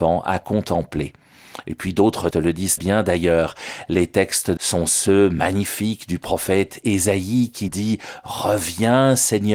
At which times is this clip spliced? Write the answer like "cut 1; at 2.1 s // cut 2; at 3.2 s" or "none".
cut 1; at 2.3 s // cut 2; at 2.8 s // cut 3; at 4.6 s // cut 4; at 7.7 s